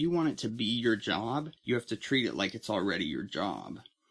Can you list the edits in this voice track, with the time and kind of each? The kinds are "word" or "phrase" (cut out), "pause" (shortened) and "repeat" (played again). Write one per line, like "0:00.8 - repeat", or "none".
0:01.6 - pause